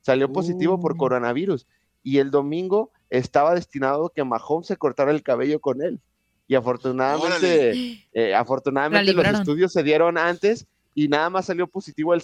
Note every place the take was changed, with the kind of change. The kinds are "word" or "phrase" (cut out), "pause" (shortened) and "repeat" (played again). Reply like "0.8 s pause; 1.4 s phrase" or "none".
none